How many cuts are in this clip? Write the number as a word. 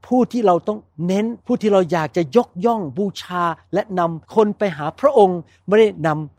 two